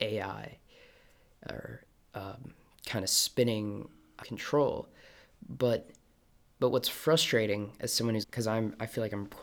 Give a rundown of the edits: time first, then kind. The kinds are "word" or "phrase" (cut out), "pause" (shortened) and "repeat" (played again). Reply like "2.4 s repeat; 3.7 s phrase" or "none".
4.2 s word; 8.2 s word